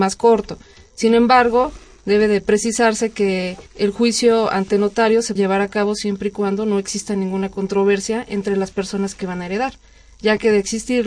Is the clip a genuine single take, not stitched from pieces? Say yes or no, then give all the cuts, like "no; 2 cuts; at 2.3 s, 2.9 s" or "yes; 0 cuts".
no; 2 cuts; at 3.7 s, 5.4 s